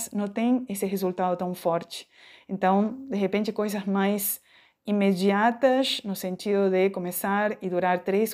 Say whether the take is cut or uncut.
uncut